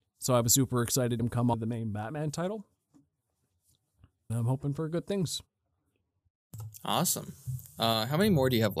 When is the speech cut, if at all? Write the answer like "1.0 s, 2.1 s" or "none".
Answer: 1.2 s, 1.5 s, 4.3 s